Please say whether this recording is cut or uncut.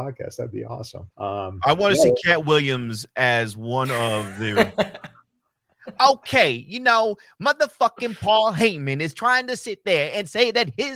cut